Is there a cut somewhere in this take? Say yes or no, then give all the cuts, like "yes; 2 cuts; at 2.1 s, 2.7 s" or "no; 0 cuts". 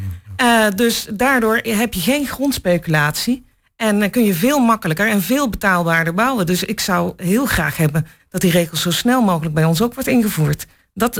no; 0 cuts